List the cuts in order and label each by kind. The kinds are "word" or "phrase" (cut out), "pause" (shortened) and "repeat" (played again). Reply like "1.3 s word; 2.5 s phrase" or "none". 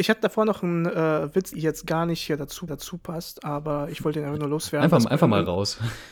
1.5 s word; 2.7 s repeat